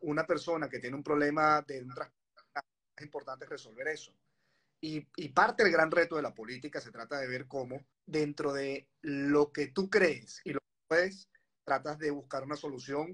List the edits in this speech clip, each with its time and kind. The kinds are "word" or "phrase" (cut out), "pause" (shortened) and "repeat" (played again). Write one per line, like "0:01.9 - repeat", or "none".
0:07.9 - pause